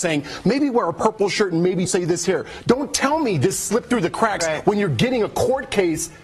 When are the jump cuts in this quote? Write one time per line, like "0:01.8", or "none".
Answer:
0:01.9